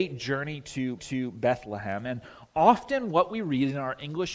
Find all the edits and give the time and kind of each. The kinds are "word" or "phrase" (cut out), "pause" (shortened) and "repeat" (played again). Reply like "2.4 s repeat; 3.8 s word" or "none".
1.0 s repeat